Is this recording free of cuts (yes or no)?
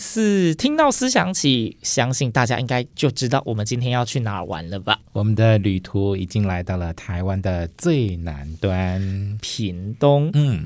no